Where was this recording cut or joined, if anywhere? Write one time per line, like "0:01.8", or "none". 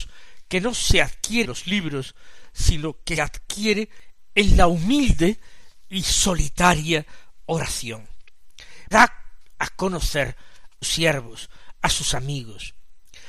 0:01.4
0:03.2
0:08.9
0:10.8